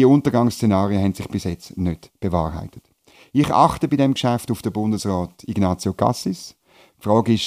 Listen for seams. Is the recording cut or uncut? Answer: uncut